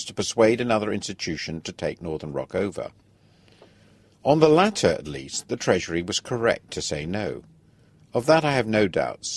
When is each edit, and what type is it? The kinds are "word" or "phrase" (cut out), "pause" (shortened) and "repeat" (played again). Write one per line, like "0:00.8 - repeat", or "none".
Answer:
none